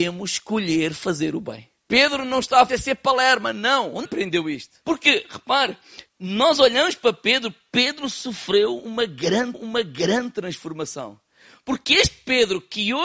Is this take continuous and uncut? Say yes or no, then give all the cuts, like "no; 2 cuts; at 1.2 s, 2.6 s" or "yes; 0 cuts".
no; 6 cuts; at 1.8 s, 2.7 s, 4.0 s, 4.8 s, 6.1 s, 9.5 s